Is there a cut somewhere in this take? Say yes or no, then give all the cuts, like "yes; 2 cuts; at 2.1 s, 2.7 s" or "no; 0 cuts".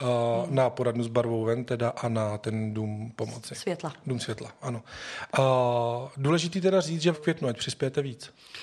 yes; 1 cut; at 7.1 s